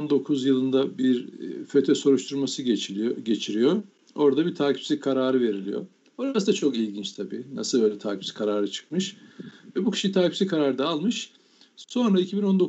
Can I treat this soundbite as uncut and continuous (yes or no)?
yes